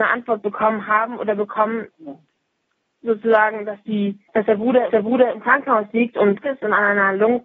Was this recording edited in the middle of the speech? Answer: yes; 3 cuts; at 4.3 s, 4.9 s, 6.4 s

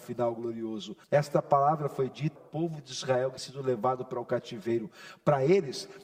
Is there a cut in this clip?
yes; 3 cuts; at 1.0 s, 2.4 s, 3.4 s

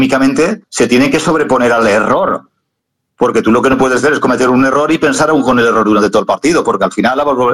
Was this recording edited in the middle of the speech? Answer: no; 0 cuts

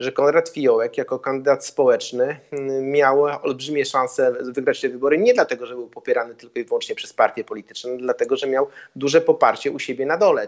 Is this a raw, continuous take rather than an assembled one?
yes; 0 cuts

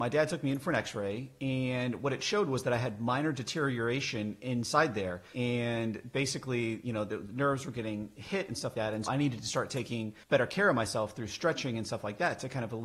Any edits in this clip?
yes; 3 cuts; at 8.7 s, 9.1 s, 10.2 s

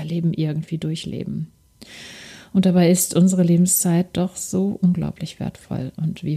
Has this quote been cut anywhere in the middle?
no; 0 cuts

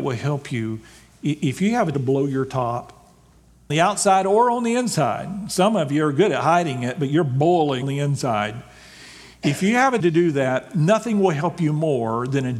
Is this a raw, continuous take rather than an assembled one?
no; 4 cuts; at 1.9 s, 3.7 s, 7.8 s, 10.0 s

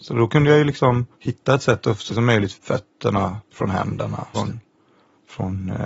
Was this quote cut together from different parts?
yes; 4 cuts; at 1.1 s, 2.1 s, 2.5 s, 4.3 s

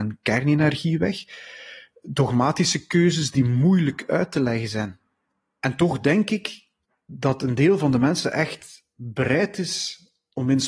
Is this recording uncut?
yes; 0 cuts

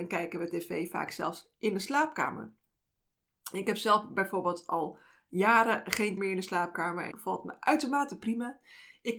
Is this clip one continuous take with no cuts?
no; 2 cuts; at 6.2 s, 7.1 s

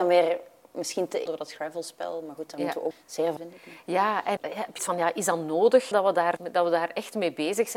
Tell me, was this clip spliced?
yes; 7 cuts; at 1.3 s, 2.9 s, 3.4 s, 4.4 s, 4.8 s, 5.9 s, 6.4 s

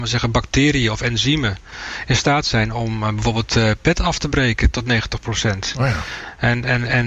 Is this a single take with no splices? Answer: yes; 0 cuts

